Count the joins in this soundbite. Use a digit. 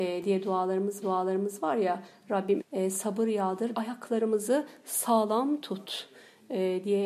3